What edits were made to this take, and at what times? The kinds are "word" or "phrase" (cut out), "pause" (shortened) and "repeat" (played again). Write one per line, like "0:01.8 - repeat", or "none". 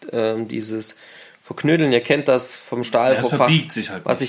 none